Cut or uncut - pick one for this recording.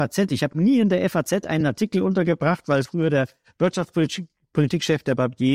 uncut